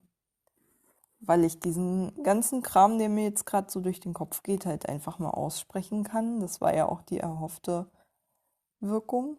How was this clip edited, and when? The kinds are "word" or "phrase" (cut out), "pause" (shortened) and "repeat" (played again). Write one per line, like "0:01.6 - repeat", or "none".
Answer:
none